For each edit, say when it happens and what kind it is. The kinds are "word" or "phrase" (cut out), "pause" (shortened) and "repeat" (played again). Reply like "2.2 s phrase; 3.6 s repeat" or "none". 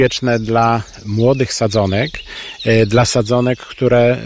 none